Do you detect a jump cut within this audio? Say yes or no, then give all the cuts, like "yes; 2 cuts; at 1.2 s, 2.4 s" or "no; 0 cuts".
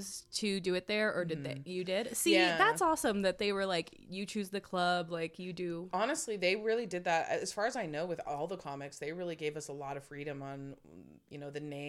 no; 0 cuts